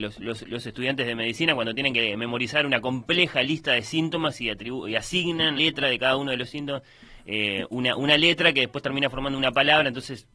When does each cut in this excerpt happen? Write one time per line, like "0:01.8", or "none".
0:05.6